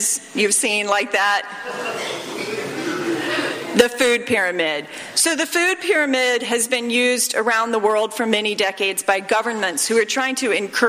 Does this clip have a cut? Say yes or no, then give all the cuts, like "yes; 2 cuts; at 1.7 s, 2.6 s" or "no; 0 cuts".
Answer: no; 0 cuts